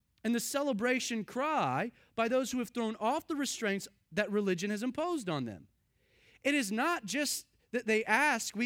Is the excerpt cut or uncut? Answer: uncut